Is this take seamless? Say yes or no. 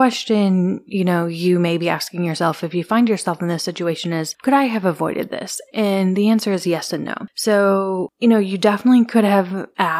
yes